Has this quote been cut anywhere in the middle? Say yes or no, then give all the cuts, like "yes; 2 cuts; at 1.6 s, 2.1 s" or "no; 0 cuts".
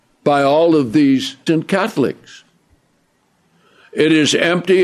yes; 1 cut; at 1.5 s